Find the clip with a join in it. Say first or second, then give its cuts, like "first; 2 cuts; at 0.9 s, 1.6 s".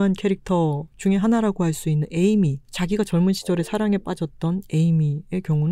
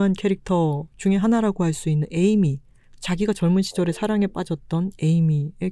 first; 1 cut; at 2.6 s